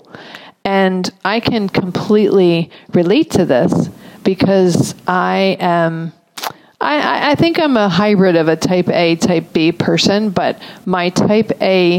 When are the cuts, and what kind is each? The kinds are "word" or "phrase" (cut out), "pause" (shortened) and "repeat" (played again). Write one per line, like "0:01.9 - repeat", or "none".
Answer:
none